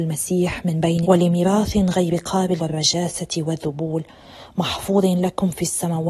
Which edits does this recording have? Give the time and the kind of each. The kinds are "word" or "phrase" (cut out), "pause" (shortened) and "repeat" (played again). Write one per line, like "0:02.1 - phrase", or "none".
0:01.0 - word
0:02.6 - word